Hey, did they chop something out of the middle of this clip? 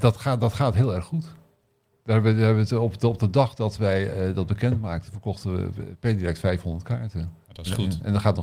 no; 0 cuts

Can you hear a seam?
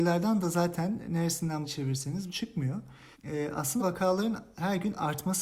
yes; 4 cuts; at 1.6 s, 2.3 s, 3.1 s, 3.8 s

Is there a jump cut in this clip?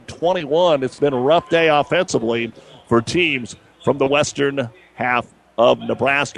no; 0 cuts

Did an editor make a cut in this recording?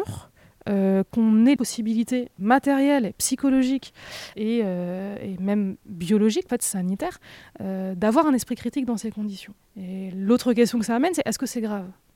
yes; 6 cuts; at 1.1 s, 1.6 s, 2.4 s, 4.3 s, 6.5 s, 9.6 s

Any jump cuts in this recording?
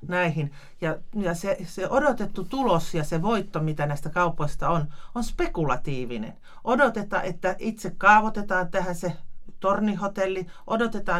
no; 0 cuts

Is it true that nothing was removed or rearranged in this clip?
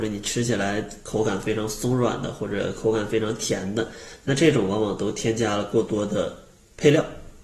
yes; 0 cuts

